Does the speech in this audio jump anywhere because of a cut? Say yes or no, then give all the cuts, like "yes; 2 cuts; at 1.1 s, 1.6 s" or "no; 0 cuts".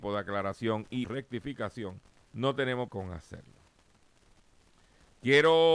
yes; 3 cuts; at 1.0 s, 2.2 s, 2.9 s